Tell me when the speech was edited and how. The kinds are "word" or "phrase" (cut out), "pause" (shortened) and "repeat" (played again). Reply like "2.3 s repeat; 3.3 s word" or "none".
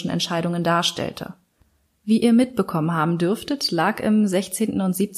none